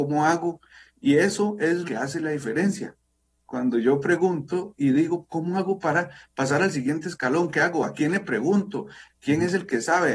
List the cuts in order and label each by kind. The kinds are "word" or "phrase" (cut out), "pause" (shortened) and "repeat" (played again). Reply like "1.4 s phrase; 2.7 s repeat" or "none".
1.8 s word